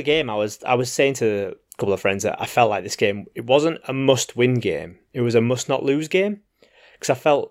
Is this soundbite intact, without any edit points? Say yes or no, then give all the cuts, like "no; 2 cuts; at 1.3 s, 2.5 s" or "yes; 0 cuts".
yes; 0 cuts